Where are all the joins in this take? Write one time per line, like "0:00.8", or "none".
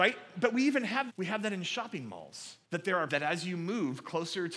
0:01.1
0:02.6
0:03.1